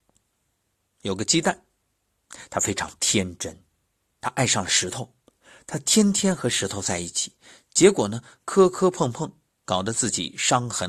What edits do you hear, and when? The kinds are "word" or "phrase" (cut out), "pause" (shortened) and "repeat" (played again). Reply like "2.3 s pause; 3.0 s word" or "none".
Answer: none